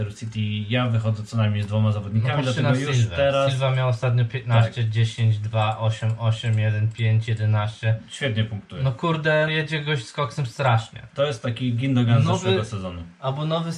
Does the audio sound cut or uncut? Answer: cut